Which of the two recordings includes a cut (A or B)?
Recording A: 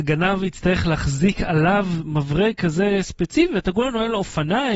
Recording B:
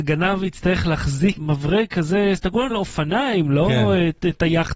B